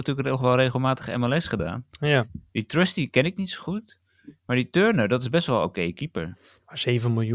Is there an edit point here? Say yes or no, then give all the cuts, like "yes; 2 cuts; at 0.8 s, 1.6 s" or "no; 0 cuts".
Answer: no; 0 cuts